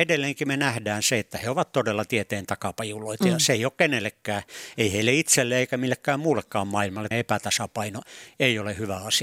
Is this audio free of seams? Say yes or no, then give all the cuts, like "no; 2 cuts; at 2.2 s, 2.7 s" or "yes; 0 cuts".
no; 1 cut; at 7.1 s